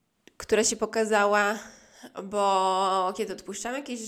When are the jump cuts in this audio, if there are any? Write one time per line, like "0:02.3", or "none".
none